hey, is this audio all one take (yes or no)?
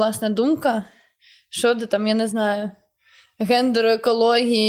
yes